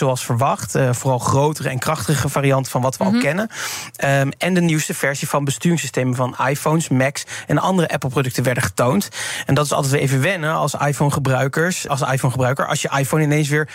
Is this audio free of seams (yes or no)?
no